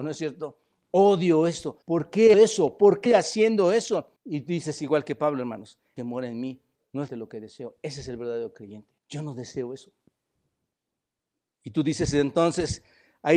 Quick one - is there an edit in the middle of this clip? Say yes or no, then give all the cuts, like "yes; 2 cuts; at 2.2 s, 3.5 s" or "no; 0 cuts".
yes; 8 cuts; at 1.8 s, 2.3 s, 3.1 s, 4.2 s, 6.0 s, 6.8 s, 7.1 s, 9.0 s